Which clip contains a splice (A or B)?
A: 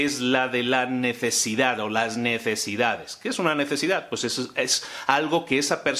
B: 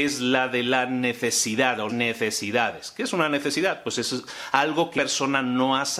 B